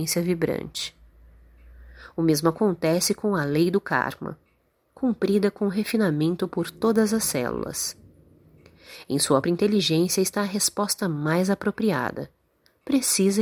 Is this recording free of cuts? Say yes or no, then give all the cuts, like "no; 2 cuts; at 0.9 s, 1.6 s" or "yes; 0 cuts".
no; 1 cut; at 9.4 s